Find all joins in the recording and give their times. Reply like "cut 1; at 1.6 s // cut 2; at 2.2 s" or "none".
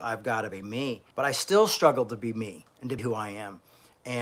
cut 1; at 1.1 s // cut 2; at 3.0 s